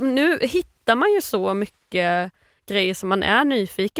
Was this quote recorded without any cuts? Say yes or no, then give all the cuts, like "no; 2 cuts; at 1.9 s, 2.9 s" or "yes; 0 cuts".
yes; 0 cuts